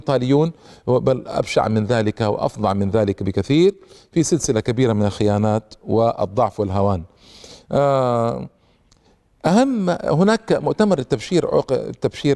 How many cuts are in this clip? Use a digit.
0